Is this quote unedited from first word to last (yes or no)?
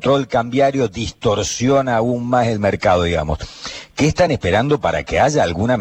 yes